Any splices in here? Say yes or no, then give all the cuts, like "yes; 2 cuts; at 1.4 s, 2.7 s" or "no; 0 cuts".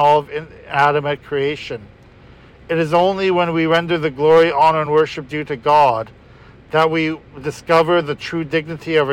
no; 0 cuts